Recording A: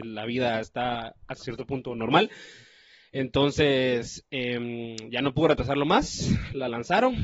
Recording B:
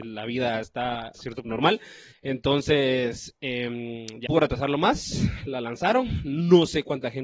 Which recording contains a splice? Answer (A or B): B